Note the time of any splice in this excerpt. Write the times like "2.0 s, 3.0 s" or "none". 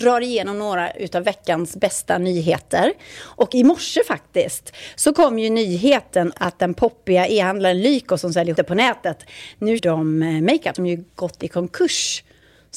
6.3 s, 8.6 s, 9.8 s, 10.7 s